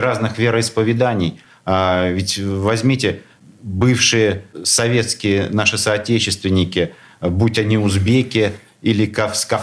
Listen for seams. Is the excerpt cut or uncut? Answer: uncut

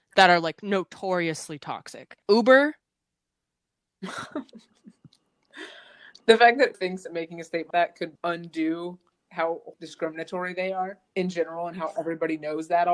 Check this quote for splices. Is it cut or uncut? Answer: cut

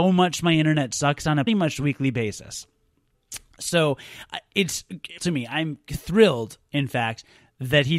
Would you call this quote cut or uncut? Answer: cut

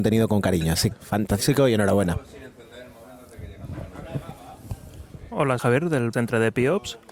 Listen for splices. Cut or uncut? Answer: cut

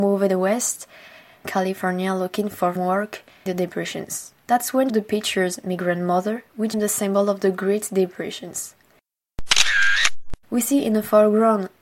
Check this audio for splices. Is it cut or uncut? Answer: cut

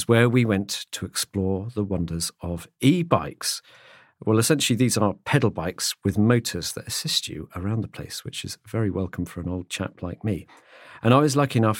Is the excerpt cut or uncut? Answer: uncut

